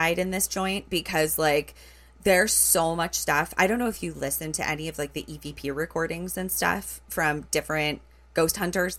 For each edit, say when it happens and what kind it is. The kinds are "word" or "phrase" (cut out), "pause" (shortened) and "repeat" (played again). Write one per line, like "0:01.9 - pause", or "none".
none